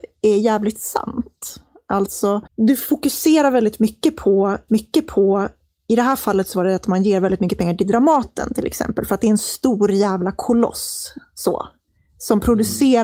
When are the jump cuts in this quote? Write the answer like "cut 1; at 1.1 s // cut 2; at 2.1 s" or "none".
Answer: cut 1; at 2.5 s // cut 2; at 4.7 s